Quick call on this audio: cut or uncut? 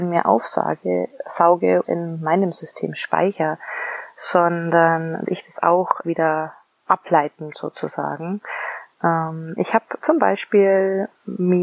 cut